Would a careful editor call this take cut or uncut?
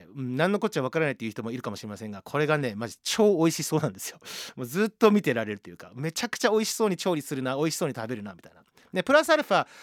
uncut